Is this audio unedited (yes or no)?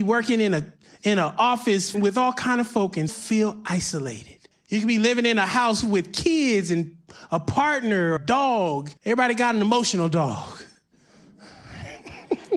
no